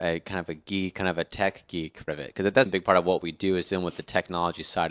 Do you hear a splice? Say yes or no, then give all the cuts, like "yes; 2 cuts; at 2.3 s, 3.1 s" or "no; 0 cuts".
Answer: yes; 2 cuts; at 2.1 s, 2.7 s